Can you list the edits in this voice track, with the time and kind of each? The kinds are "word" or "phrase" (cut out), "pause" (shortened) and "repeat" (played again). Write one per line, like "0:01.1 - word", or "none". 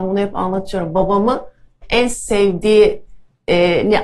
0:01.8 - word

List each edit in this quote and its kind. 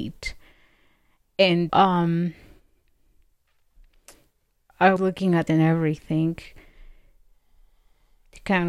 0:01.7 - word
0:05.0 - word
0:05.5 - word

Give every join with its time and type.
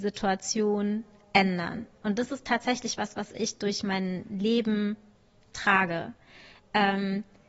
none

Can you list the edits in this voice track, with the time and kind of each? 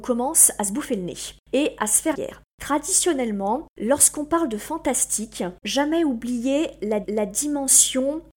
0:02.1 - word
0:03.7 - pause
0:05.6 - phrase
0:07.0 - repeat

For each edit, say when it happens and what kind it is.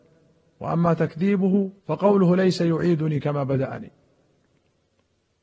0:01.8 - pause

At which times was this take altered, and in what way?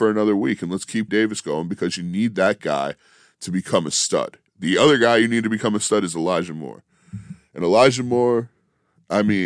0:01.1 - word
0:04.5 - pause

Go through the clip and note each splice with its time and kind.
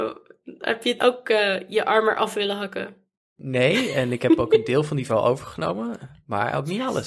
0:01.0 - word
0:05.1 - word

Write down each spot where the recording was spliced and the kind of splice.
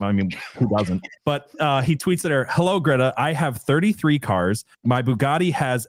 0:01.2 - pause
0:04.7 - pause

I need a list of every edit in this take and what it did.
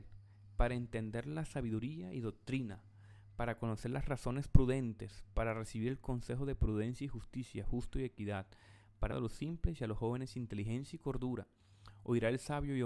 0:09.1 - phrase

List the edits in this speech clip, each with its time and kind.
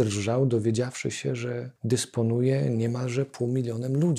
0:01.8 - pause

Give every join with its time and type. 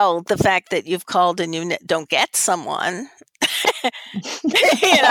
none

